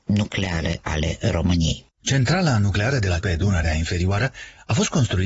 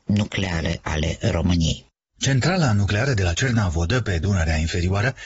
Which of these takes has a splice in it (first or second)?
first